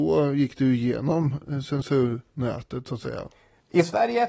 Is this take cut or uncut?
uncut